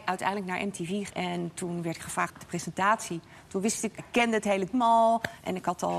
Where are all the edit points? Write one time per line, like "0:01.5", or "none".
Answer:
0:01.1
0:02.3
0:04.0
0:04.7